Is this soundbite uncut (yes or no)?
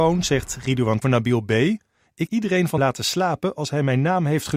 no